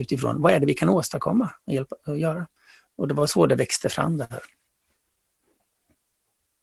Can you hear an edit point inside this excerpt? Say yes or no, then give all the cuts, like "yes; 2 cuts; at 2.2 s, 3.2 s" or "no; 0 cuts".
no; 0 cuts